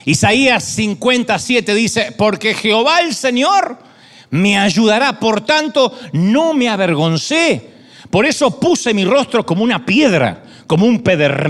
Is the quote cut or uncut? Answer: uncut